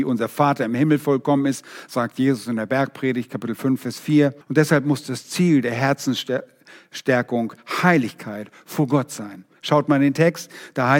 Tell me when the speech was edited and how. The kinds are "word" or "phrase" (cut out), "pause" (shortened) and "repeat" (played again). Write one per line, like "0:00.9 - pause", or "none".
0:04.4 - pause